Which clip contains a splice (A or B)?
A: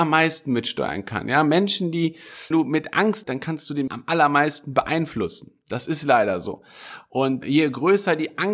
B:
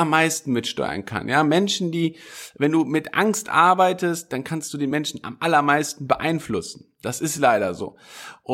A